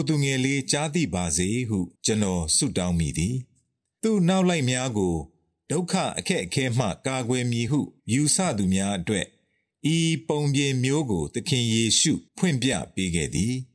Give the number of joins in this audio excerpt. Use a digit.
3